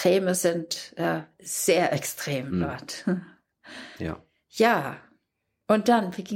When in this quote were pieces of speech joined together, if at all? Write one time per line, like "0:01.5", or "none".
none